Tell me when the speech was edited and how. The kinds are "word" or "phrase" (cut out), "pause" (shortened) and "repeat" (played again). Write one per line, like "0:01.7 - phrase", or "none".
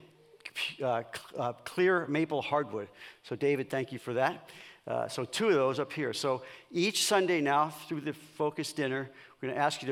none